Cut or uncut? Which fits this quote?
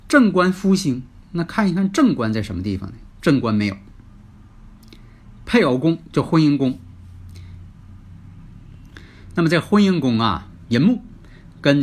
cut